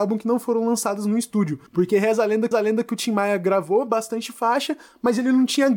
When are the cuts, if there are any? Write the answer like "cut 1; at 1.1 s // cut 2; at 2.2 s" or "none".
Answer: cut 1; at 1.7 s // cut 2; at 2.5 s